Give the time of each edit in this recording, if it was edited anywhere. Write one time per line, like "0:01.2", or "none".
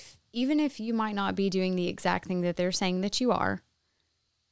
none